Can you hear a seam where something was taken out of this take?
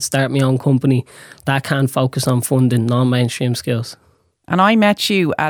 no; 0 cuts

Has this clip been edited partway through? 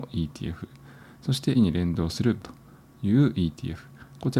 yes; 2 cuts; at 1.5 s, 2.4 s

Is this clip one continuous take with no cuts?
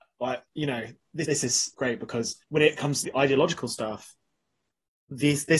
no; 4 cuts; at 1.2 s, 1.7 s, 2.4 s, 3.0 s

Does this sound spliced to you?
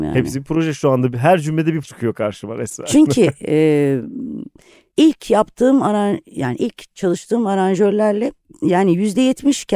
yes; 2 cuts; at 1.8 s, 8.4 s

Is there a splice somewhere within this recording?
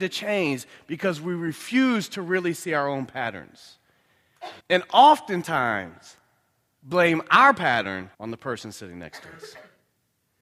yes; 2 cuts; at 4.6 s, 8.1 s

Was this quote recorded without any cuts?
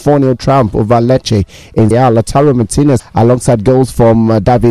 no; 2 cuts; at 1.9 s, 3.0 s

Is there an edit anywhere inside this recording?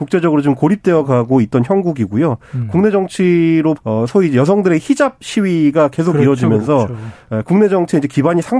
yes; 1 cut; at 3.8 s

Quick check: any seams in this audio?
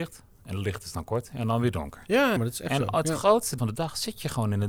yes; 2 cuts; at 2.4 s, 3.6 s

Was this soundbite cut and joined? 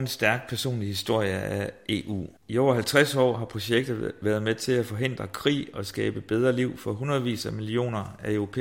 yes; 1 cut; at 2.4 s

